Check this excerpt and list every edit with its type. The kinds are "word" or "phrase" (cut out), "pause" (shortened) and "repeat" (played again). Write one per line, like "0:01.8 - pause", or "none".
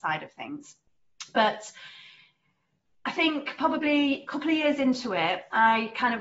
none